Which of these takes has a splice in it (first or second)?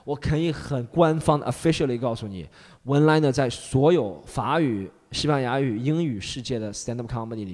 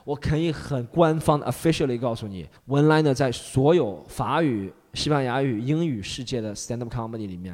second